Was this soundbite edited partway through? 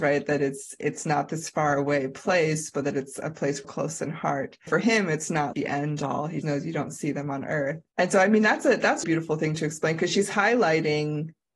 yes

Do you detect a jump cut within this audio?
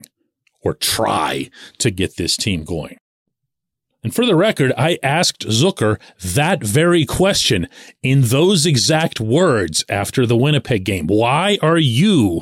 no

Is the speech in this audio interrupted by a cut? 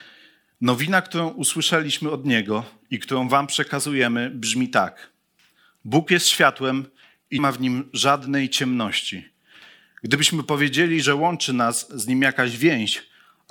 yes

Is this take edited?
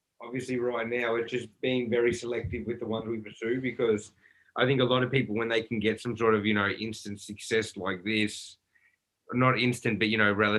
no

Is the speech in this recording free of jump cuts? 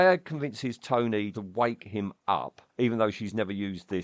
no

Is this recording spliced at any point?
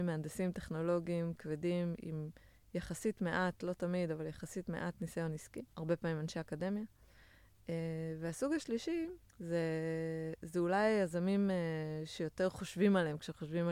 yes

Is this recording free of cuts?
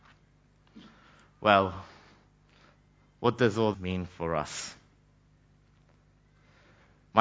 no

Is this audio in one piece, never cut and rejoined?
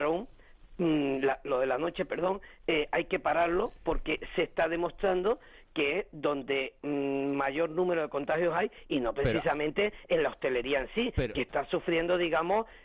yes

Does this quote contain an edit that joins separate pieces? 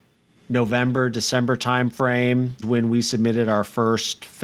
yes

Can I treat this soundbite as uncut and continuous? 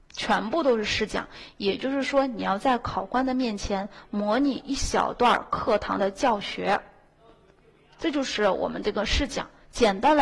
yes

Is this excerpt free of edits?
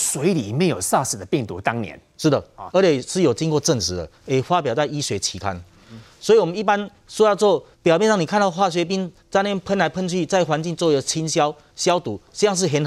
no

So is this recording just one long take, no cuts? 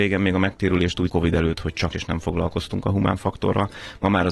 no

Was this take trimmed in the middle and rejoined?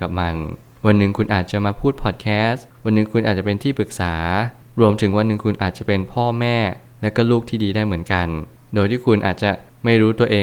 no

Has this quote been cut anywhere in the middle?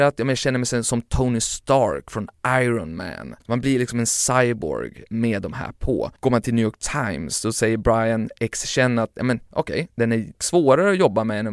yes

